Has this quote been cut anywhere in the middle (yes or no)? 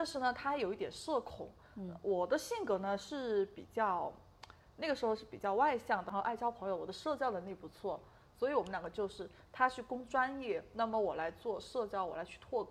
no